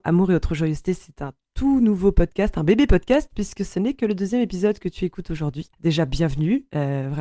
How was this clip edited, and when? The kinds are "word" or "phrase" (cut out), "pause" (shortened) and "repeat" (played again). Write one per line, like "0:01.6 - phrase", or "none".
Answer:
0:05.7 - pause